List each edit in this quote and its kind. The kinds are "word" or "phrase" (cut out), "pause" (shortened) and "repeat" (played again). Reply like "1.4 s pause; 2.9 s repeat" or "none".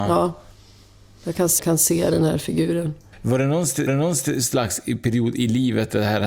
1.6 s word; 3.1 s pause; 3.9 s repeat